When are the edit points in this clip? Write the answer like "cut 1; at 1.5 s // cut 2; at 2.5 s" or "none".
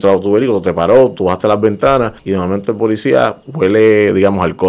cut 1; at 2.2 s // cut 2; at 3.4 s